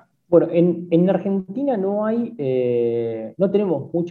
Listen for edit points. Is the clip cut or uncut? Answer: uncut